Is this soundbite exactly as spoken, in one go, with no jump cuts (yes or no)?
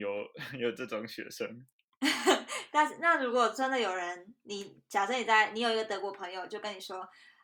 no